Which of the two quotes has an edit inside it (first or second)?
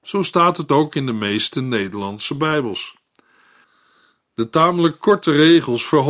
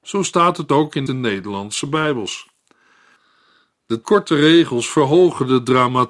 second